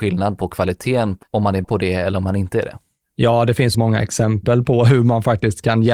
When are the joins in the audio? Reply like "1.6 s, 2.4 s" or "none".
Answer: 1.2 s, 1.6 s, 3.7 s